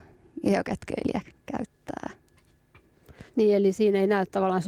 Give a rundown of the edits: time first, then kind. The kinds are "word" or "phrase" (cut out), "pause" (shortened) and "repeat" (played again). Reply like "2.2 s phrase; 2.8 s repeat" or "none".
3.3 s pause